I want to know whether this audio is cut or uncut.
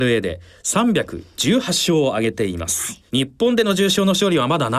cut